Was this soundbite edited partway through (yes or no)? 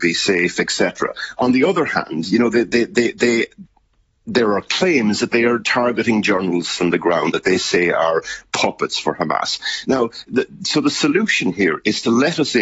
yes